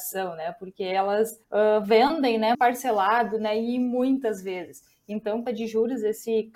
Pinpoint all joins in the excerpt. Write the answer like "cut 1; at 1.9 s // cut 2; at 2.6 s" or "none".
cut 1; at 1.4 s // cut 2; at 2.5 s // cut 3; at 5.5 s